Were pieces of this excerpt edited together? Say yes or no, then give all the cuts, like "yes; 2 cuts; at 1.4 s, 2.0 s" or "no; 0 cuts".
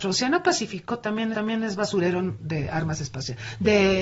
yes; 1 cut; at 1.3 s